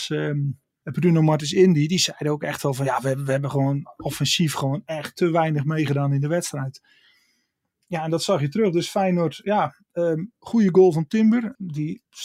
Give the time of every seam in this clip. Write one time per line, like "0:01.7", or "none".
none